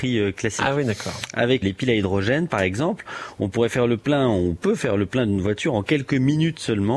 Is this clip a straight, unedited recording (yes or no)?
no